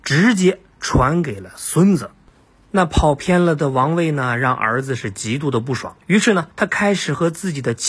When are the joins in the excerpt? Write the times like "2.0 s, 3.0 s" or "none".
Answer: 6.0 s, 6.5 s